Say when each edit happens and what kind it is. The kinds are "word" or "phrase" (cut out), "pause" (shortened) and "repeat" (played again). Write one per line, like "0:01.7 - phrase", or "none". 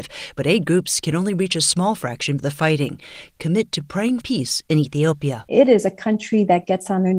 0:02.4 - word
0:04.2 - word